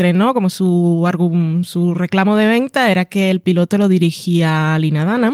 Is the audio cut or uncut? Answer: uncut